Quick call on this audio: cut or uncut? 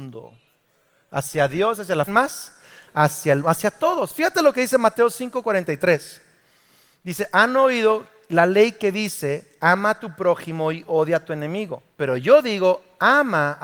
cut